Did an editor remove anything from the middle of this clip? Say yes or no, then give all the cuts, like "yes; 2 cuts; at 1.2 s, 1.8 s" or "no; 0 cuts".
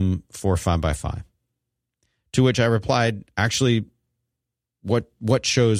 no; 0 cuts